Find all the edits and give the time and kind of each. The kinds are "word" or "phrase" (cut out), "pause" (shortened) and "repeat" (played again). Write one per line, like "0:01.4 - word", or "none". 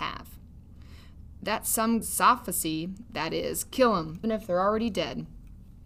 0:02.0 - word
0:04.2 - word